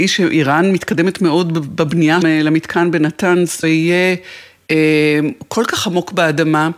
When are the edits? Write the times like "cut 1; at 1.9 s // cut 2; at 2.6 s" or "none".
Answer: cut 1; at 2.2 s // cut 2; at 3.6 s